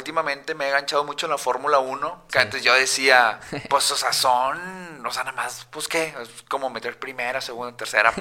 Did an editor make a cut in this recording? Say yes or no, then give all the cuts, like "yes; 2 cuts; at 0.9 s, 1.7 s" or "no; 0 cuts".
no; 0 cuts